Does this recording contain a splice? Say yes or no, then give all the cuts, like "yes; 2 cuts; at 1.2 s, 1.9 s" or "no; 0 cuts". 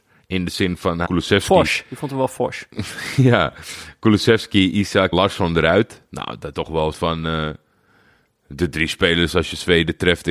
yes; 4 cuts; at 1.0 s, 5.1 s, 6.5 s, 6.9 s